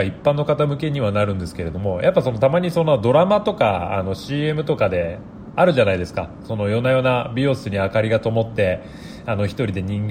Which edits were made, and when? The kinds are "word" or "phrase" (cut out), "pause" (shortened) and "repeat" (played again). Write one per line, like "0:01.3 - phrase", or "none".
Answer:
none